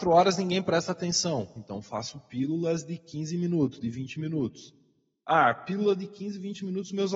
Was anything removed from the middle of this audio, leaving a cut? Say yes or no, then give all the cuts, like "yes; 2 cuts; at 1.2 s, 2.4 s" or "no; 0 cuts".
no; 0 cuts